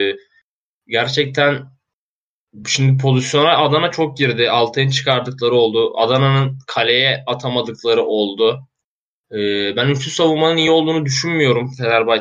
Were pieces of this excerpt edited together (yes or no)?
no